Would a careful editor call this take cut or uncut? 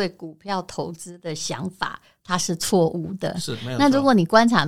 uncut